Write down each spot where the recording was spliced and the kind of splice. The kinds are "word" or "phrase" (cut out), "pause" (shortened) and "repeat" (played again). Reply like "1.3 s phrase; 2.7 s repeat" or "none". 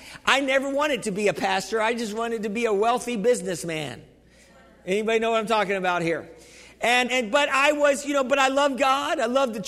7.1 s word